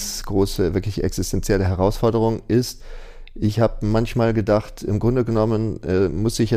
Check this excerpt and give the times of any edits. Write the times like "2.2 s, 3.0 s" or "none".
none